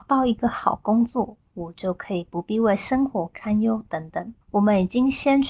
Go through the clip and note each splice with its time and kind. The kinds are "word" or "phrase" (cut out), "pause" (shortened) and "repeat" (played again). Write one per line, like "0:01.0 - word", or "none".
0:04.4 - pause